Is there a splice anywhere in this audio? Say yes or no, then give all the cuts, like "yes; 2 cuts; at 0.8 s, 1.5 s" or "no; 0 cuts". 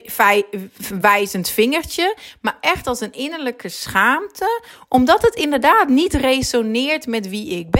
no; 0 cuts